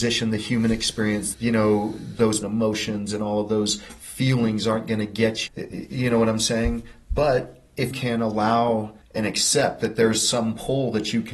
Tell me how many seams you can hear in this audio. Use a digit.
5